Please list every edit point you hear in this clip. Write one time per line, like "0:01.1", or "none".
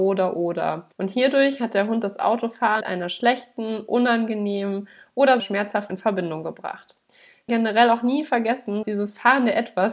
0:00.9
0:02.8
0:05.4
0:05.9
0:07.5
0:08.8